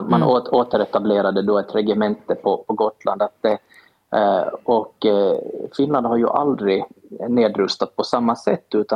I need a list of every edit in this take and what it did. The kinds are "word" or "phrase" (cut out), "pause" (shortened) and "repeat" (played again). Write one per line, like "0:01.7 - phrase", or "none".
0:02.6 - word